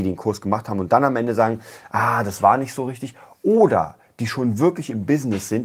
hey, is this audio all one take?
yes; 0 cuts

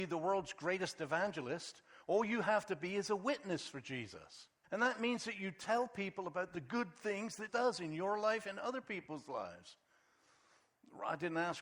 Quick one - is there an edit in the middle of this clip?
yes; 2 cuts; at 4.6 s, 7.5 s

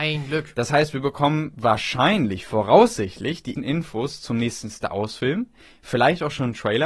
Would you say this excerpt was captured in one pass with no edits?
no; 1 cut; at 3.5 s

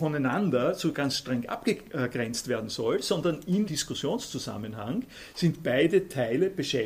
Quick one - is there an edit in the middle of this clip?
yes; 1 cut; at 3.7 s

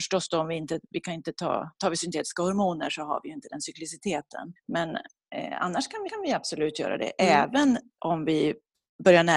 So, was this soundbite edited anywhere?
yes; 3 cuts; at 4.6 s, 6.1 s, 8.0 s

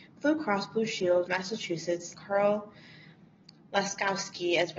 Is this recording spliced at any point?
yes; 2 cuts; at 1.3 s, 2.1 s

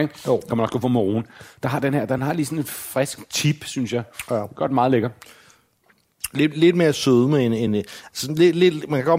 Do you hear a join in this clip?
no; 0 cuts

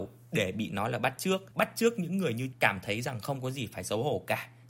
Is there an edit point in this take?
yes; 2 cuts; at 1.5 s, 2.5 s

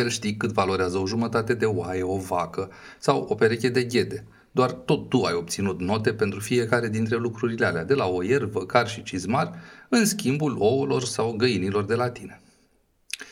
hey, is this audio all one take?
yes; 0 cuts

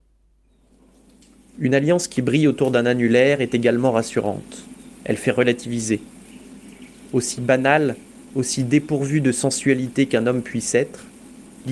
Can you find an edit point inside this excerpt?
no; 0 cuts

